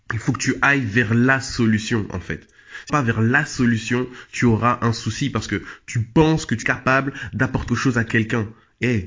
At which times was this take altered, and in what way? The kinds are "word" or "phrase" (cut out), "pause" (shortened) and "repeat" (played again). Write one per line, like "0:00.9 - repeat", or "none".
0:02.9 - phrase
0:06.6 - word
0:07.7 - word